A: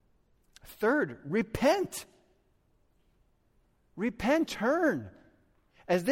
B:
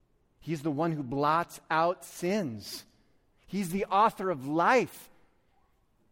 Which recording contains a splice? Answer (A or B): A